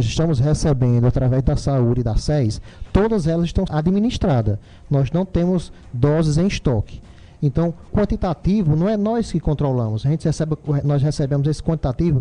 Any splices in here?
yes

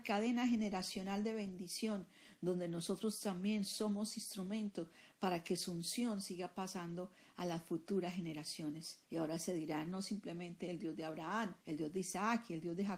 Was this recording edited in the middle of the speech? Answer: yes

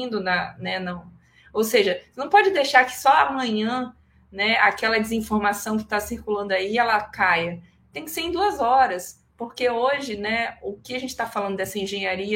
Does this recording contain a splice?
no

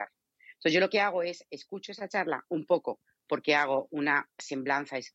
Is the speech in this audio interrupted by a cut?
no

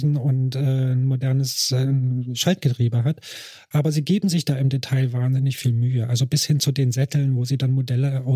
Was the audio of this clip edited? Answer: no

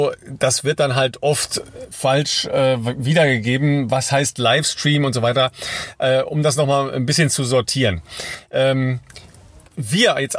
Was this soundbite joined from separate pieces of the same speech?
no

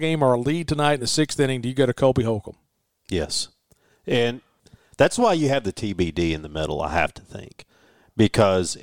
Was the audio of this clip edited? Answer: no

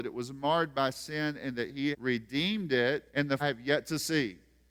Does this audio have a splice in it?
yes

